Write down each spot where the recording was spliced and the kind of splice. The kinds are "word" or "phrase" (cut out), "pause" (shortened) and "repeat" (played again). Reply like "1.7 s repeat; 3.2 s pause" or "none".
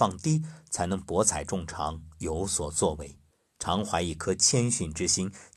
3.3 s pause